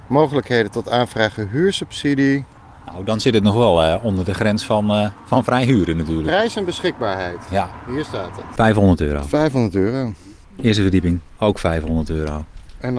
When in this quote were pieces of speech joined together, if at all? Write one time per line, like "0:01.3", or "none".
none